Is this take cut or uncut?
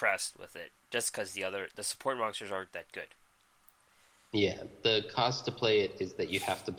uncut